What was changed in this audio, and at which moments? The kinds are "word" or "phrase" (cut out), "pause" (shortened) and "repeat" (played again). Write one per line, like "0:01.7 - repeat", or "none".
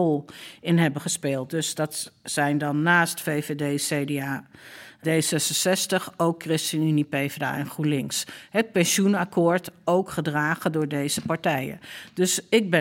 0:05.0 - word